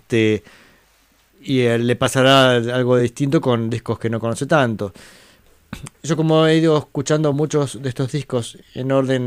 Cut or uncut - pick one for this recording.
uncut